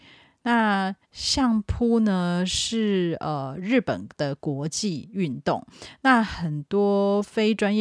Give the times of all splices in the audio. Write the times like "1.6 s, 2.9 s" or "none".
1.0 s